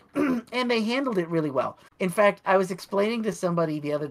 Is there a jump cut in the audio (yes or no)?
yes